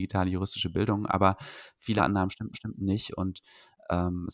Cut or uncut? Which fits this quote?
cut